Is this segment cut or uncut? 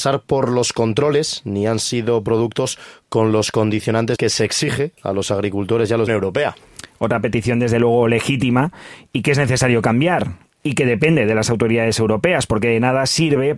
cut